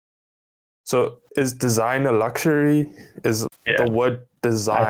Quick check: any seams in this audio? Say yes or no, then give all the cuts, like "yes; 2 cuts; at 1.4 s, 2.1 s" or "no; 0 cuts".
yes; 2 cuts; at 1.3 s, 3.5 s